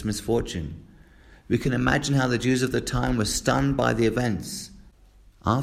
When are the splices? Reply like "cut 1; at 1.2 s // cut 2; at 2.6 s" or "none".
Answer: none